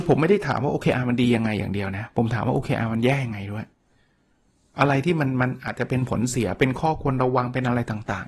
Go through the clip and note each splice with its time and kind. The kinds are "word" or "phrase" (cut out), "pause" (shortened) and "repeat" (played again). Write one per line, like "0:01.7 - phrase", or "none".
none